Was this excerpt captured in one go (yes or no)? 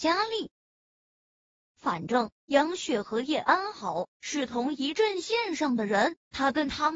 yes